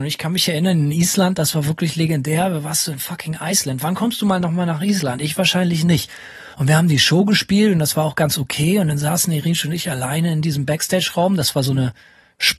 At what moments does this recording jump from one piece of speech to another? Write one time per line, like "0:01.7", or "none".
0:06.5